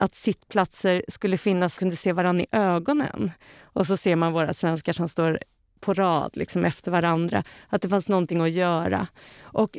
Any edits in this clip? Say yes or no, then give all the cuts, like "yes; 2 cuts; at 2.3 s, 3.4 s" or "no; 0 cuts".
yes; 2 cuts; at 1.8 s, 4.8 s